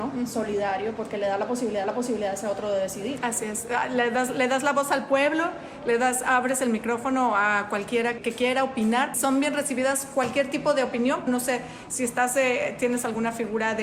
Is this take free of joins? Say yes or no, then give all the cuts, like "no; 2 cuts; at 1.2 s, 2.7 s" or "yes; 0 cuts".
no; 4 cuts; at 1.8 s, 8.2 s, 9.1 s, 11.3 s